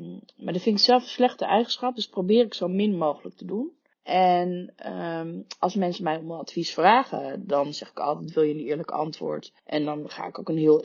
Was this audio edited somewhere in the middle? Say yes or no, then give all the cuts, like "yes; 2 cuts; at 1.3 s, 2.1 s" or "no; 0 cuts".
yes; 2 cuts; at 3.9 s, 9.6 s